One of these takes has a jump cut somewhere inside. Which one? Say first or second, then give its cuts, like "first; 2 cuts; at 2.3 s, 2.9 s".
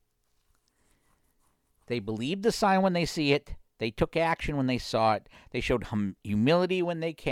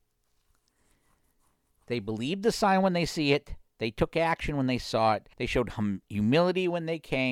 second; 1 cut; at 5.3 s